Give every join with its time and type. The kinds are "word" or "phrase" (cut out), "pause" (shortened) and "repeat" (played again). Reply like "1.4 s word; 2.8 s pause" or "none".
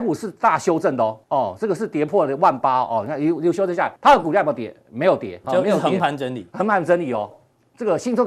1.2 s pause; 4.0 s word; 5.4 s word